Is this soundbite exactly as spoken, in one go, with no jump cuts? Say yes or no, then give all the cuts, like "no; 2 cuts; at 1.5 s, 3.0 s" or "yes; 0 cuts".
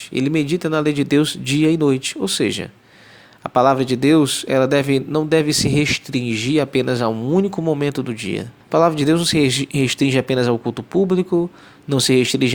no; 1 cut; at 8.6 s